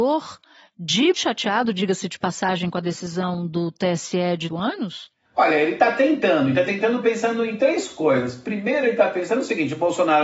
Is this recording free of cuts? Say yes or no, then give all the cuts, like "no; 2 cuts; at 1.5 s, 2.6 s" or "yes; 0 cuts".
no; 2 cuts; at 1.1 s, 4.5 s